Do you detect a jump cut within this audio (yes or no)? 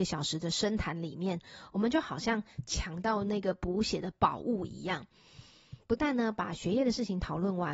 no